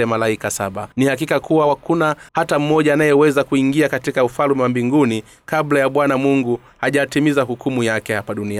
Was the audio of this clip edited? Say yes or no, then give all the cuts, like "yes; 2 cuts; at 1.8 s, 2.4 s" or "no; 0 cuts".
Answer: yes; 2 cuts; at 0.9 s, 2.3 s